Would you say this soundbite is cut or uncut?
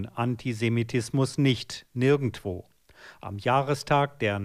uncut